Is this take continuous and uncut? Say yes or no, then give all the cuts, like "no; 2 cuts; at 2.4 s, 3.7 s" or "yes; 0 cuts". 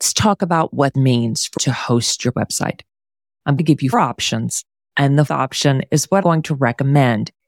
no; 7 cuts; at 0.9 s, 1.6 s, 2.3 s, 3.6 s, 3.9 s, 5.3 s, 6.2 s